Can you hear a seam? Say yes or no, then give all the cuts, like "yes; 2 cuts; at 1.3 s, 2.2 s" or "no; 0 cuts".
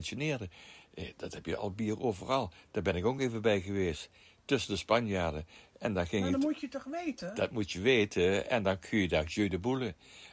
no; 0 cuts